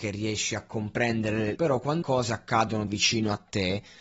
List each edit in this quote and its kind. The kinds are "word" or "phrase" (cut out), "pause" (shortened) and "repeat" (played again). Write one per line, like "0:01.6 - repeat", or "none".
0:01.6 - phrase
0:02.0 - word
0:02.9 - word